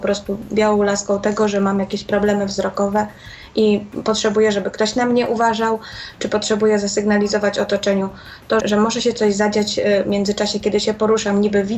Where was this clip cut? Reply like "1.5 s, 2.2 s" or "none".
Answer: 8.6 s